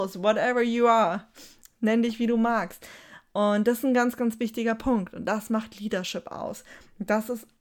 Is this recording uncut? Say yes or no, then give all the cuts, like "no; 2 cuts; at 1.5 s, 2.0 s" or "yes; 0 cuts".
yes; 0 cuts